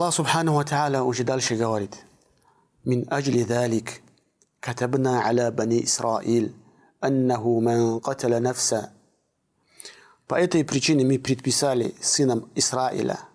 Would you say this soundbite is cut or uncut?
uncut